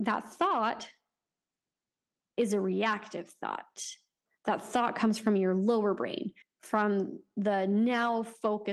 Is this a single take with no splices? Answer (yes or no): no